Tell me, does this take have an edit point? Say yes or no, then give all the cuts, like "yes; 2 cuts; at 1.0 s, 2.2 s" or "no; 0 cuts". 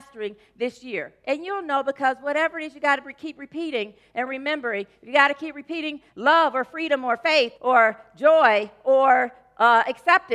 yes; 1 cut; at 7.5 s